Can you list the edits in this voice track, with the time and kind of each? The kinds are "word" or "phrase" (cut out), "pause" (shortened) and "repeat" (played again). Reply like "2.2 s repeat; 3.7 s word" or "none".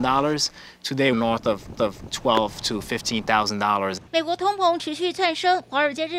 1.1 s word; 1.7 s repeat; 4.1 s pause